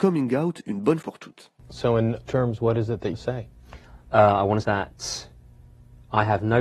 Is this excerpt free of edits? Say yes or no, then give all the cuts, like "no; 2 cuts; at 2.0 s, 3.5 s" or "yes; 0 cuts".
no; 4 cuts; at 1.0 s, 2.3 s, 3.1 s, 4.6 s